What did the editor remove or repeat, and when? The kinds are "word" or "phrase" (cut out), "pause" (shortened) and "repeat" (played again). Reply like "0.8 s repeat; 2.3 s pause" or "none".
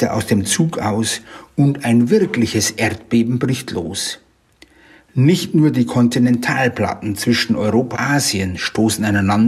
7.9 s word